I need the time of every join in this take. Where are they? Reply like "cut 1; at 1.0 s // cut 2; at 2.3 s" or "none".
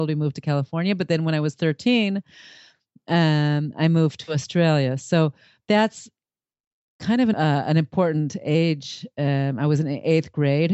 cut 1; at 7.3 s

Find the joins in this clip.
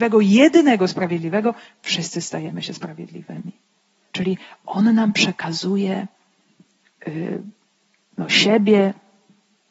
none

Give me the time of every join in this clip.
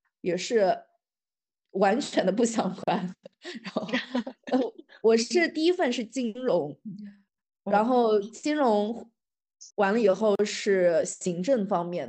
cut 1; at 9.7 s

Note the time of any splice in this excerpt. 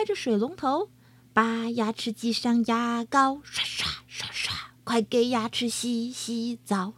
cut 1; at 1.1 s

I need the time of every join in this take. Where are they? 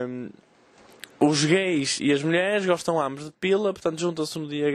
none

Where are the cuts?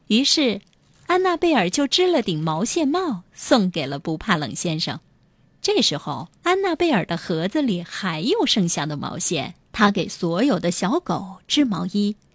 cut 1; at 6.4 s // cut 2; at 9.6 s

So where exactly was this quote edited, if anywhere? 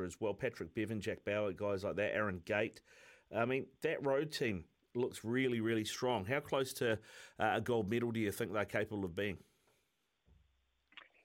none

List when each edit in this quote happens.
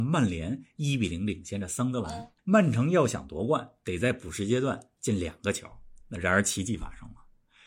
cut 1; at 2.4 s

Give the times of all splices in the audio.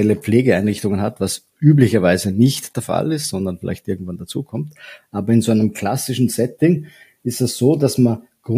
none

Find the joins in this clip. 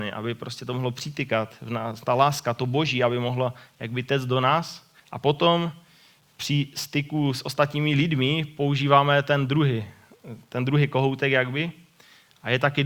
cut 1; at 5.0 s

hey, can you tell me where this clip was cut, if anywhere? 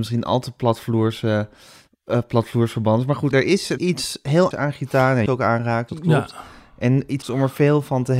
cut 1; at 3.3 s // cut 2; at 3.8 s // cut 3; at 4.5 s // cut 4; at 5.3 s // cut 5; at 5.9 s // cut 6; at 7.2 s

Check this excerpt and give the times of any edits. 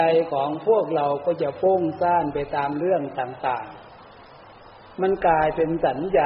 none

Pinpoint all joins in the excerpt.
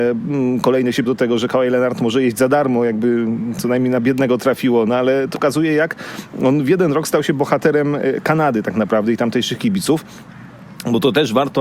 cut 1; at 1.0 s // cut 2; at 5.3 s

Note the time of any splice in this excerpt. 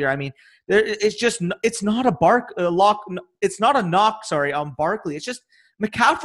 none

